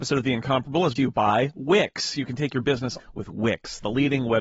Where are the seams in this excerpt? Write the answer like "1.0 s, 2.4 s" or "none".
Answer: 1.0 s, 3.0 s